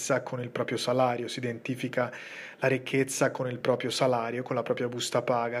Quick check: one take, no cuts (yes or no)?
yes